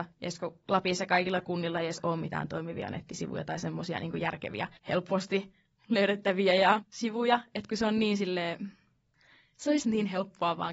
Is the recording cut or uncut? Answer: cut